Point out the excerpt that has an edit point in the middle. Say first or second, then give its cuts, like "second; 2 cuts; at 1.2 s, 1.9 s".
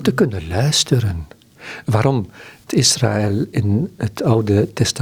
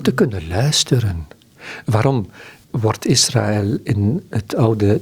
first; 1 cut; at 2.7 s